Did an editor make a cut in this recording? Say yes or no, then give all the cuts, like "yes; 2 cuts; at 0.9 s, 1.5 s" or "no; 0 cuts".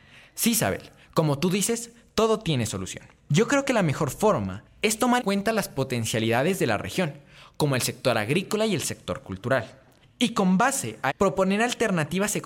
yes; 2 cuts; at 5.2 s, 11.1 s